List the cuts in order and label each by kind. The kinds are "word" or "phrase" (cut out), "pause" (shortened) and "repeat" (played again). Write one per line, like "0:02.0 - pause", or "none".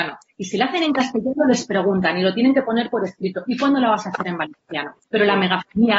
0:05.0 - pause